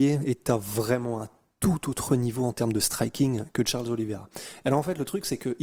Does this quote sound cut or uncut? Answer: uncut